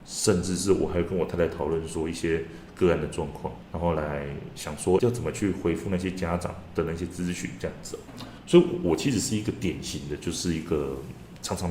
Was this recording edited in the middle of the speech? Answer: yes; 1 cut; at 5.0 s

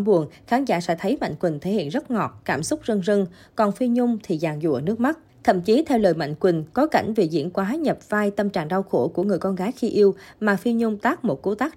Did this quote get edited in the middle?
no; 0 cuts

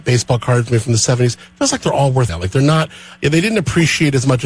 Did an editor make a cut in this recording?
yes; 1 cut; at 2.3 s

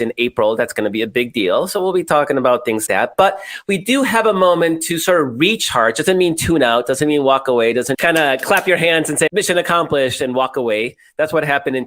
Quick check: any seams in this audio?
yes; 3 cuts; at 2.9 s, 7.9 s, 9.3 s

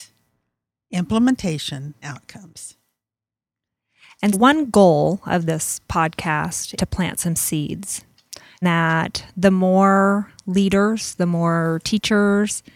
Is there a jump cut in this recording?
yes; 4 cuts; at 2.0 s, 4.3 s, 6.8 s, 8.6 s

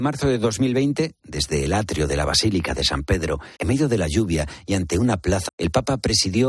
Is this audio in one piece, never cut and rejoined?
no; 2 cuts; at 3.5 s, 5.5 s

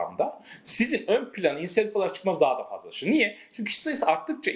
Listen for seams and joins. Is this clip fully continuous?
yes; 0 cuts

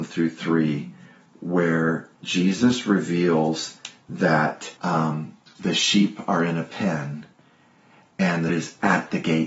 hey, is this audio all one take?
no; 3 cuts; at 2.1 s, 4.8 s, 8.5 s

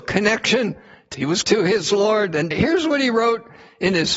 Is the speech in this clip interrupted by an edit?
yes; 3 cuts; at 1.1 s, 1.4 s, 2.5 s

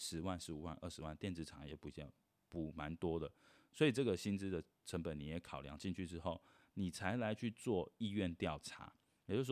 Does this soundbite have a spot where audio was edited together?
no; 0 cuts

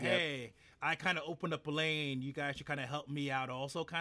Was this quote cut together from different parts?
no; 0 cuts

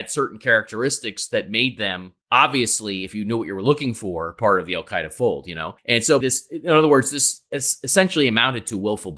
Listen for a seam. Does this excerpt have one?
yes; 3 cuts; at 2.2 s, 5.8 s, 6.2 s

